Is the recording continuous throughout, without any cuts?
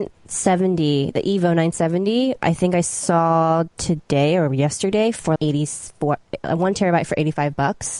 no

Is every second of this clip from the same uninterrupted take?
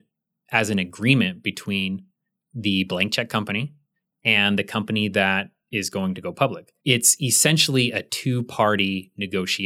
no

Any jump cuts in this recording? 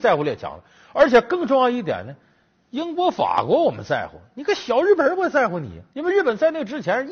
yes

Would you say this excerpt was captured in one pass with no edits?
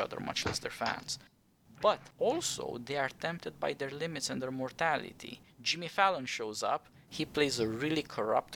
yes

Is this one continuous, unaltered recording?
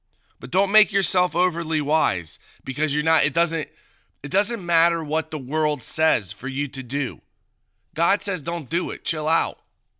yes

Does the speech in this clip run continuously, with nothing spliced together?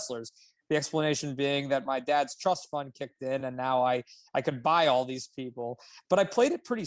yes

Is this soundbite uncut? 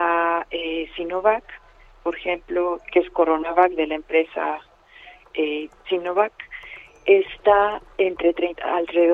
yes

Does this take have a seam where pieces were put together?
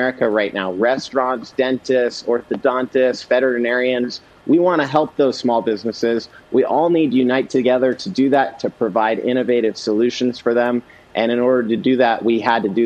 no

